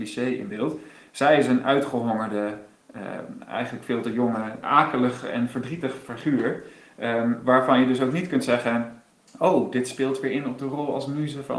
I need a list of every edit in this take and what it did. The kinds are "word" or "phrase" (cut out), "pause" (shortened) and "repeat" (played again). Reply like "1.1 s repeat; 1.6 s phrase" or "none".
4.6 s word